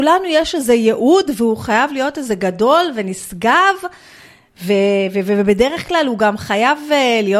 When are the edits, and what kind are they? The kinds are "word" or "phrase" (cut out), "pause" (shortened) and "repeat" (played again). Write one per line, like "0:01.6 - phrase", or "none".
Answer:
none